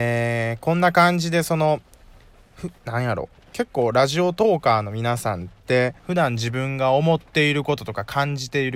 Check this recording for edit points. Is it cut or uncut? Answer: cut